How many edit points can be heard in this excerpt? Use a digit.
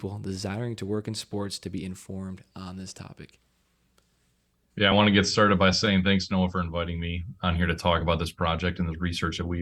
0